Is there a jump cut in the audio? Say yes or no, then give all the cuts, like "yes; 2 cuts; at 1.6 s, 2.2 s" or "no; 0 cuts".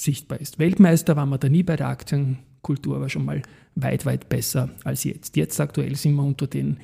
no; 0 cuts